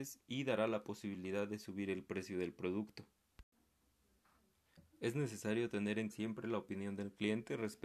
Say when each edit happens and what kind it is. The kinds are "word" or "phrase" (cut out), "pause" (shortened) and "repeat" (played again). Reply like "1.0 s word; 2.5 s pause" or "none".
6.1 s word